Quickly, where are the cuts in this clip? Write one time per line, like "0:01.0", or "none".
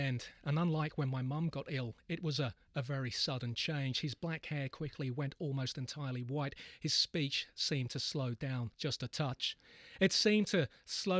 0:08.7